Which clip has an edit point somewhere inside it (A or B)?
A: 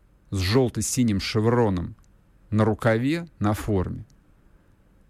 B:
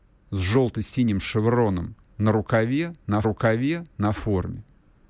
B